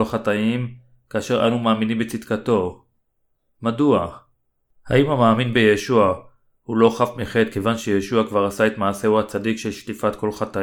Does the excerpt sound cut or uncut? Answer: uncut